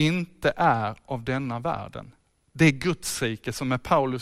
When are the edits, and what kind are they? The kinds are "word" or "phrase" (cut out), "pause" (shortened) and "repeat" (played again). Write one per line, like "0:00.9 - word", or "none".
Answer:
0:02.2 - pause